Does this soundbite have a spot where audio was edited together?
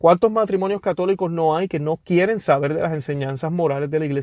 no; 0 cuts

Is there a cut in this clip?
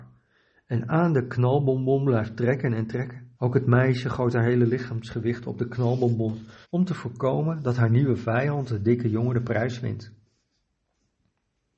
yes; 2 cuts; at 3.3 s, 6.6 s

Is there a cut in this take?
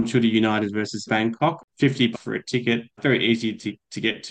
yes; 3 cuts; at 1.1 s, 2.1 s, 3.0 s

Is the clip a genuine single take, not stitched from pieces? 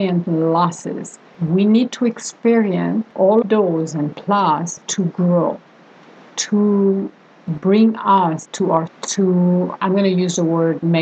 no; 3 cuts; at 3.4 s, 8.4 s, 8.9 s

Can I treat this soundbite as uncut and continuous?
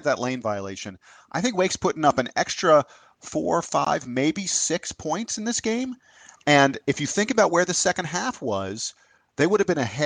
yes; 0 cuts

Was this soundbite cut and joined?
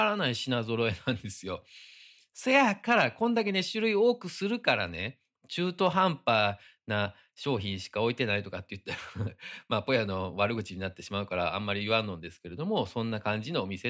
no; 0 cuts

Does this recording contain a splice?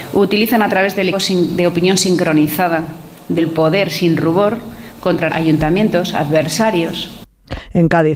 yes; 3 cuts; at 1.1 s, 3.4 s, 5.3 s

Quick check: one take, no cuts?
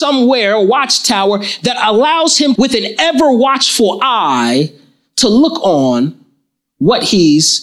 no; 1 cut; at 2.5 s

